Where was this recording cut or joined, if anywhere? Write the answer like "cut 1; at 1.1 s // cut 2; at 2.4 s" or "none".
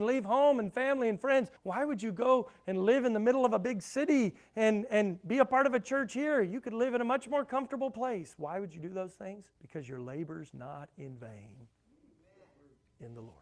cut 1; at 1.6 s // cut 2; at 9.6 s